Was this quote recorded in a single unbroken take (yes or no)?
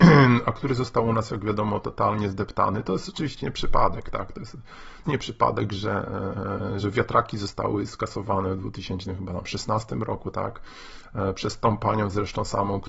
no